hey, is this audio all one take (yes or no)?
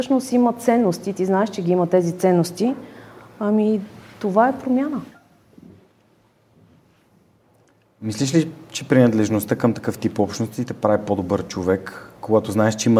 yes